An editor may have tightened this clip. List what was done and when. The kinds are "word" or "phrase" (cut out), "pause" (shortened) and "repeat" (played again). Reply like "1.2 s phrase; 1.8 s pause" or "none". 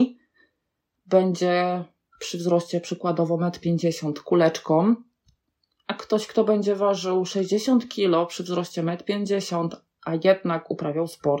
none